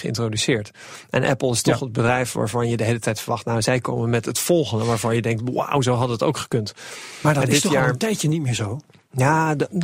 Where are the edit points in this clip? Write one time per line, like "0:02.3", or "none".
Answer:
none